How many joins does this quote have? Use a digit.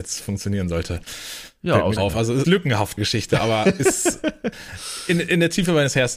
3